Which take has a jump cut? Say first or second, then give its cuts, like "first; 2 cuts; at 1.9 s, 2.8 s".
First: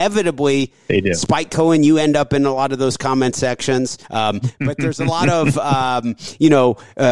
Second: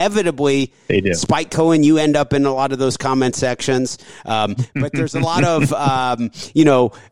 first; 1 cut; at 4.0 s